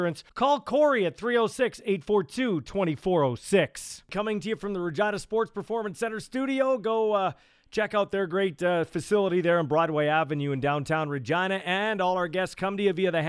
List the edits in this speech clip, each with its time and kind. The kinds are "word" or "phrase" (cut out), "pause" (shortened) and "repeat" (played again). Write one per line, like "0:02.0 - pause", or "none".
none